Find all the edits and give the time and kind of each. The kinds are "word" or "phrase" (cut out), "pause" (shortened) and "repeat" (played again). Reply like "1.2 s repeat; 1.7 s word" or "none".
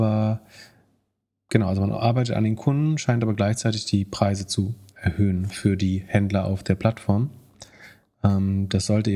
none